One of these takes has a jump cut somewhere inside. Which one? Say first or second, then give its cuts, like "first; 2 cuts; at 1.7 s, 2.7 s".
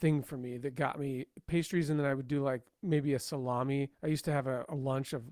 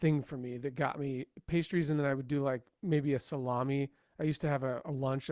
first; 1 cut; at 3.9 s